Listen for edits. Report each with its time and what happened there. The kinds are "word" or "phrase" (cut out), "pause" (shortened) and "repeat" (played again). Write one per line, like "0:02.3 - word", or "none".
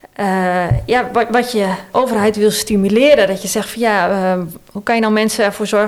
0:01.9 - word